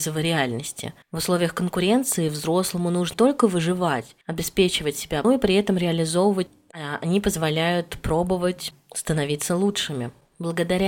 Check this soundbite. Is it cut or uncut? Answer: cut